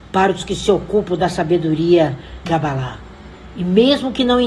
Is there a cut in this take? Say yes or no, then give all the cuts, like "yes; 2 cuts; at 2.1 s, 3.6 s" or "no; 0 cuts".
yes; 1 cut; at 2.5 s